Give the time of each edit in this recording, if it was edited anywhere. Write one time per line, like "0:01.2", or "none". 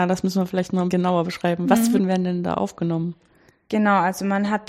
0:00.9
0:02.0